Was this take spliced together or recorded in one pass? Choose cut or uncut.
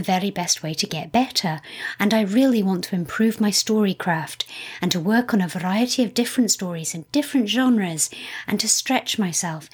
uncut